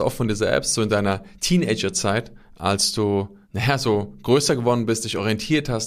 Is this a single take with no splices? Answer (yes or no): no